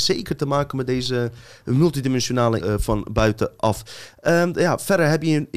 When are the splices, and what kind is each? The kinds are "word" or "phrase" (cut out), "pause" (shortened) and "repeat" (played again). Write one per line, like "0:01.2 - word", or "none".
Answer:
0:02.6 - word